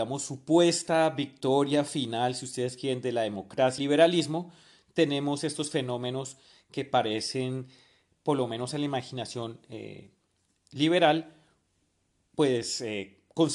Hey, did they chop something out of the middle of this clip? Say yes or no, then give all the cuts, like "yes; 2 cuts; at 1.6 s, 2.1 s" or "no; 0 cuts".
yes; 1 cut; at 3.8 s